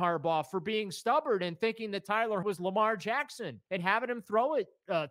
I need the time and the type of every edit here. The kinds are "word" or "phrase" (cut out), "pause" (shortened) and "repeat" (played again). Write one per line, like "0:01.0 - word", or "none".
0:02.4 - word
0:03.7 - pause